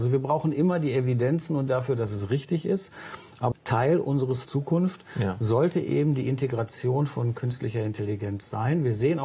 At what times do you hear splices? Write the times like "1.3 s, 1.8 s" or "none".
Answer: 1.7 s, 3.5 s, 4.4 s